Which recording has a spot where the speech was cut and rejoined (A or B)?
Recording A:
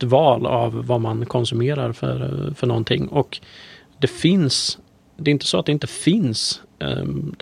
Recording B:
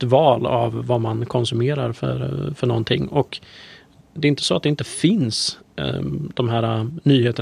B